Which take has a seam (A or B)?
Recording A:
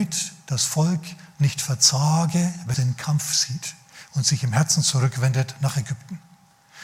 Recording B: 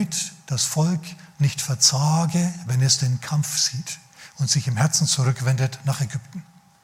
A